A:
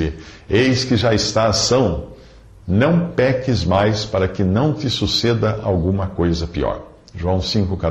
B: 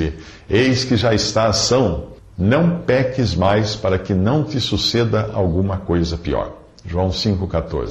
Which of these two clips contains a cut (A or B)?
B